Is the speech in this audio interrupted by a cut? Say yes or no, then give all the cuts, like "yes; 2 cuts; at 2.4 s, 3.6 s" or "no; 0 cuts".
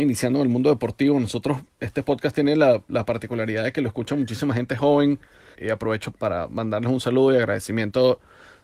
yes; 2 cuts; at 5.5 s, 6.1 s